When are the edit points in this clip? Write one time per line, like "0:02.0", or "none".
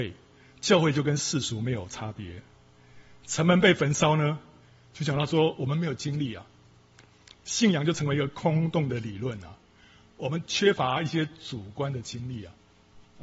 none